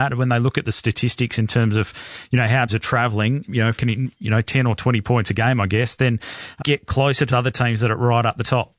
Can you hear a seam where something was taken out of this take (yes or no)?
yes